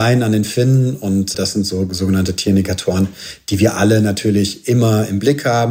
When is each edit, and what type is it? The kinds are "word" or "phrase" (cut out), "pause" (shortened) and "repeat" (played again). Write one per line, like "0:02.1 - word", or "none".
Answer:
0:01.3 - word